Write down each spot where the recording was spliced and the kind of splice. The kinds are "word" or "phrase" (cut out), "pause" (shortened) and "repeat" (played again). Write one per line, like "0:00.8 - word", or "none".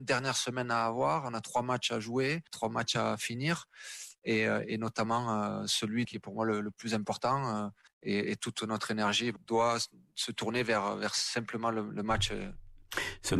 none